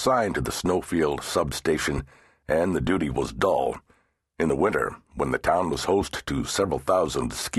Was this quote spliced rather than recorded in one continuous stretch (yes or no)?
no